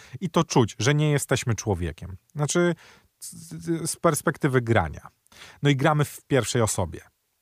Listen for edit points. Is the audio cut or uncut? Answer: uncut